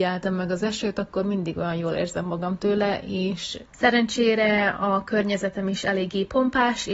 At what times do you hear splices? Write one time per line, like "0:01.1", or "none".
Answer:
0:03.7